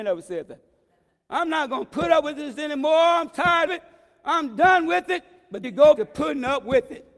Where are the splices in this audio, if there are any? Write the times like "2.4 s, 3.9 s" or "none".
2.6 s, 3.7 s, 5.6 s, 6.0 s